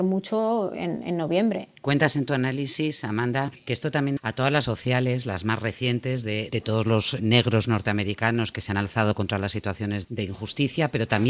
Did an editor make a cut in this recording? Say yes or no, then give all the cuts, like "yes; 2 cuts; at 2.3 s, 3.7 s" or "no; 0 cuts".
yes; 4 cuts; at 4.2 s, 4.6 s, 6.5 s, 10.0 s